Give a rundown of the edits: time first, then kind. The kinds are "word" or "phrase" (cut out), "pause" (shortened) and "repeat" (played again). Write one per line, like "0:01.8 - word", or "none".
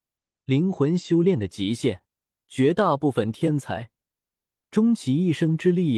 none